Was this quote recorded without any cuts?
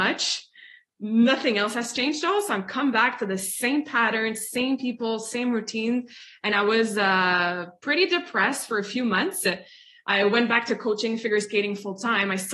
yes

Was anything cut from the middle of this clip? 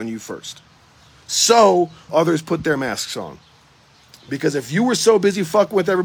yes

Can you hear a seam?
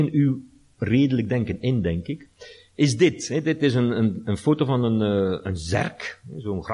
no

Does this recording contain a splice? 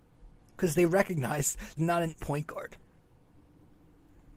yes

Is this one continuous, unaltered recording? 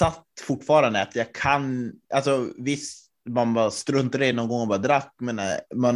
yes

